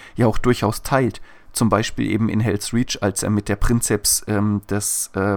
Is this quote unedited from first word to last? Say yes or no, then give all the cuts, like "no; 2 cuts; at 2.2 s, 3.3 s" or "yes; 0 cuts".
yes; 0 cuts